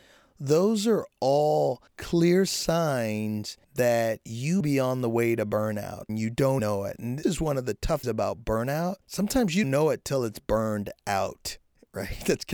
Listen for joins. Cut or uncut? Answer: cut